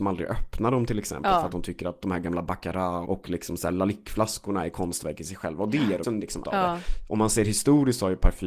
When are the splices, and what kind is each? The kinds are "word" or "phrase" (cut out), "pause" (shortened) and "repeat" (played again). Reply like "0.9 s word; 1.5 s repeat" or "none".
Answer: 3.0 s word; 6.0 s phrase; 6.4 s word